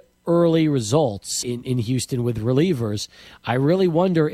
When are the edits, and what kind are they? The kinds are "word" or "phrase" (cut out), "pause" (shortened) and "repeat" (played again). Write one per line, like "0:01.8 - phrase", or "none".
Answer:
0:01.4 - word